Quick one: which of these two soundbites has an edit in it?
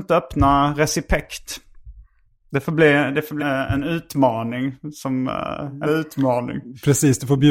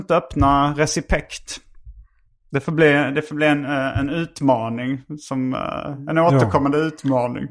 first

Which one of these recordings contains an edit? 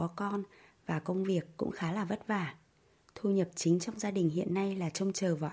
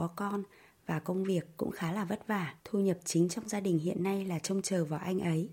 second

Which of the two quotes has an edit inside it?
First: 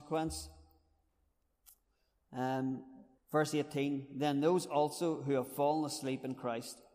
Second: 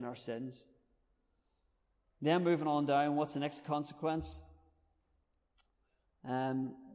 first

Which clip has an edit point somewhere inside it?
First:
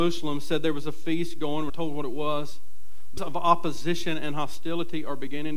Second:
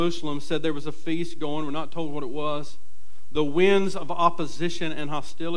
first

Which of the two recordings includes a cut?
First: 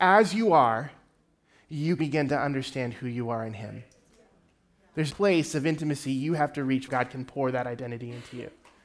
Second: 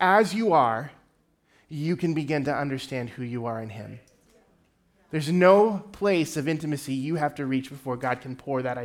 first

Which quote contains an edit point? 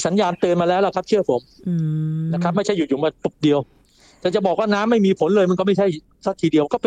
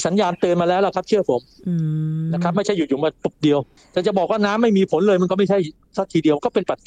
second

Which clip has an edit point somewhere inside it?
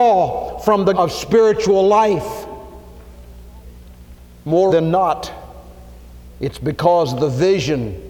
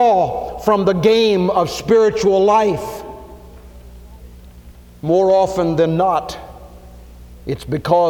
first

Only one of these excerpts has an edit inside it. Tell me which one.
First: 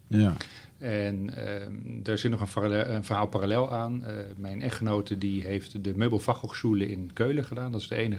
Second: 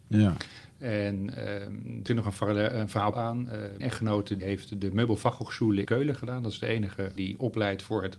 second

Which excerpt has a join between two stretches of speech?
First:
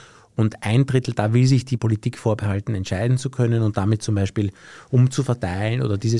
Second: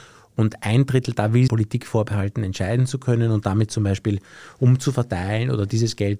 second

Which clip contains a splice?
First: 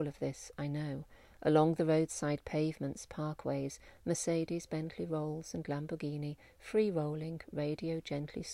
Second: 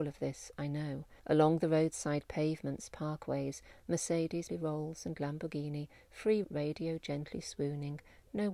second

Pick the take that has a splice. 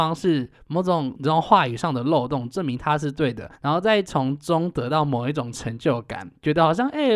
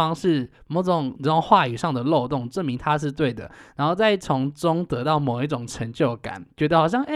first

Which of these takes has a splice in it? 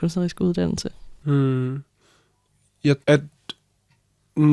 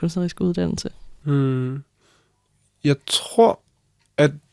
first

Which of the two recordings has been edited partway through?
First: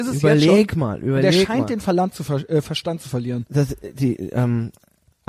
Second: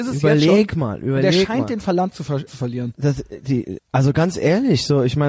second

